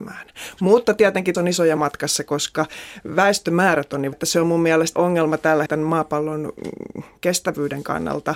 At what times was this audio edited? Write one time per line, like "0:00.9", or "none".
0:01.3
0:01.8
0:04.1
0:05.0
0:05.7

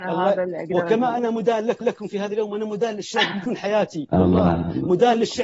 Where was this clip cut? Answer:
0:01.8
0:03.5

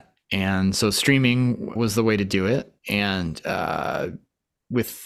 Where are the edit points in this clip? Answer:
0:01.7
0:02.8

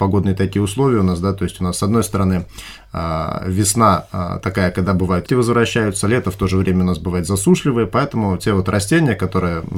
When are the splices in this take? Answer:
0:05.3

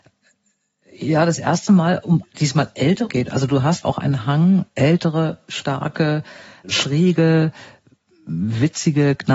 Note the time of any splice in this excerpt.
0:02.2
0:03.1
0:03.8
0:04.7
0:06.6

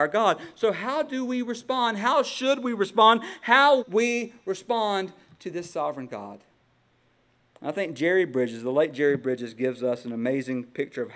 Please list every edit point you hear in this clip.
0:03.8

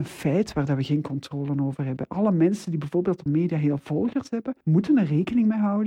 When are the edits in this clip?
0:03.3
0:03.8
0:04.6

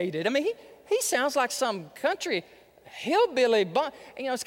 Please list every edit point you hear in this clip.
none

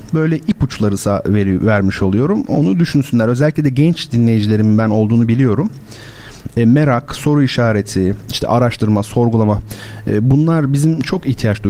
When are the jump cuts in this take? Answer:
none

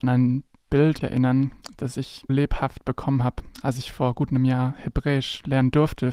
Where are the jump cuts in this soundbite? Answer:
0:01.0
0:02.3

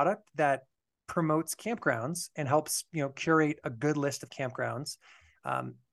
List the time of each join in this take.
none

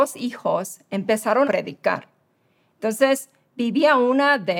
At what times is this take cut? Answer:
0:01.4

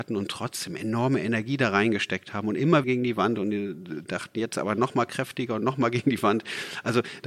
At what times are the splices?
0:02.8

